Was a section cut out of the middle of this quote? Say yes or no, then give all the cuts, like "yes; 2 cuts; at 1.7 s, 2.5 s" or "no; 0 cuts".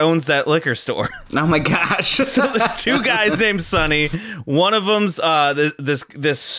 no; 0 cuts